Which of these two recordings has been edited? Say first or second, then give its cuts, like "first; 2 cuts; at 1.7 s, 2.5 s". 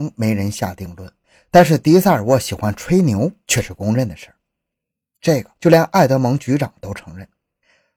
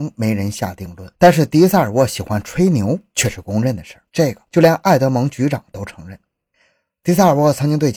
second; 2 cuts; at 1.1 s, 4.1 s